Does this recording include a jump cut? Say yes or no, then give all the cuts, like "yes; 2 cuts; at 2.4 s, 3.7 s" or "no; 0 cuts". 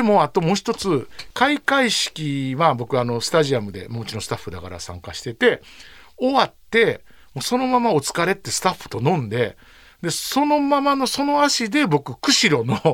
no; 0 cuts